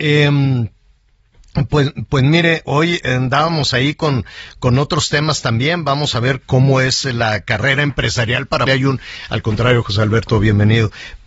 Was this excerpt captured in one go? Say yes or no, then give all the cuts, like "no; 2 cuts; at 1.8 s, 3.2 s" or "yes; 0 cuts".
no; 2 cuts; at 6.4 s, 8.7 s